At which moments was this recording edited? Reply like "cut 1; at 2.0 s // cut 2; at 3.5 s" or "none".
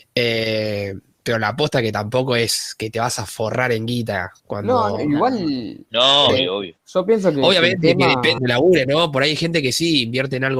cut 1; at 4.4 s // cut 2; at 6.3 s // cut 3; at 6.8 s // cut 4; at 8.4 s